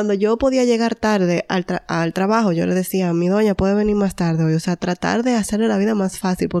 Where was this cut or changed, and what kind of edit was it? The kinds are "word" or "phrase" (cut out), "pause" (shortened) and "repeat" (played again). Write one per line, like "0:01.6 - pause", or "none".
none